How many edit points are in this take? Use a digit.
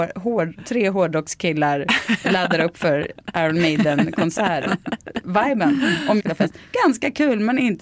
1